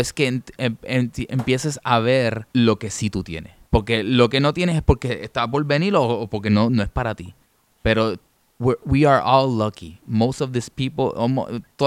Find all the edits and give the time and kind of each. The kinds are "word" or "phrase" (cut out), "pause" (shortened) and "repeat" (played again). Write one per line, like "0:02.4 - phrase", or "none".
0:02.5 - pause
0:03.7 - pause